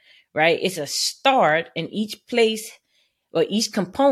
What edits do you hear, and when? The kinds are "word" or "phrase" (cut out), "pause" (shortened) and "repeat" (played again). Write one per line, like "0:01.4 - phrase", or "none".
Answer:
none